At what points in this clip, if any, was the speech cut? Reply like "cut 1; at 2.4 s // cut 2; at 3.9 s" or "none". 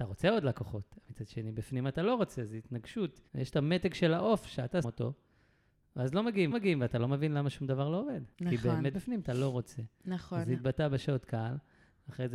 cut 1; at 3.3 s // cut 2; at 4.8 s // cut 3; at 6.5 s // cut 4; at 8.3 s // cut 5; at 8.9 s